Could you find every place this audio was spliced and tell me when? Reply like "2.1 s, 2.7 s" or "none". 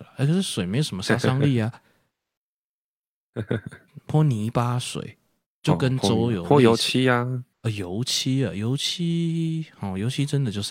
5.5 s, 7.5 s